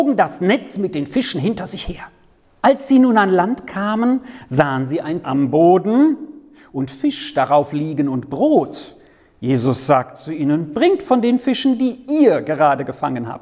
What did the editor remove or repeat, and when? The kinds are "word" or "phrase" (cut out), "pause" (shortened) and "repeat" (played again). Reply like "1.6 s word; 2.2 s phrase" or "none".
5.2 s word